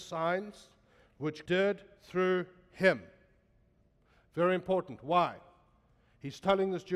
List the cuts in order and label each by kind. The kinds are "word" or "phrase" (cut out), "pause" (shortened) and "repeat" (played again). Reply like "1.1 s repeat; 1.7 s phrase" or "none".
1.5 s word